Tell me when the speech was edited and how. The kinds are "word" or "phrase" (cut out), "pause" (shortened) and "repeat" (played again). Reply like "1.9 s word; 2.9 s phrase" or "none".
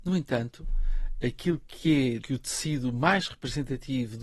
2.2 s word